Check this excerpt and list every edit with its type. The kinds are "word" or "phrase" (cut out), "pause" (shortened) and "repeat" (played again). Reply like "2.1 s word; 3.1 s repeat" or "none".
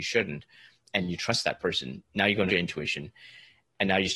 2.5 s phrase